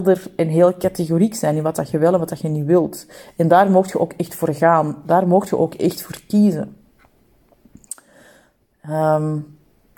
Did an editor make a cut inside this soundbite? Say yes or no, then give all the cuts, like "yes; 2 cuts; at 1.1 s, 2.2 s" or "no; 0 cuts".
no; 0 cuts